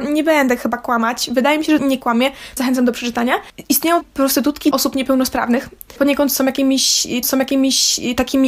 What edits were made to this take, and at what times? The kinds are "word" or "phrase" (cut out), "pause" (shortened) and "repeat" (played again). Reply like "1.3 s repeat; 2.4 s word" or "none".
1.8 s phrase; 2.6 s word; 4.0 s word; 4.7 s word; 6.0 s word; 7.2 s repeat